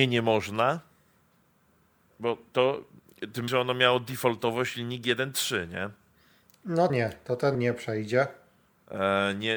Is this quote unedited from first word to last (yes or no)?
no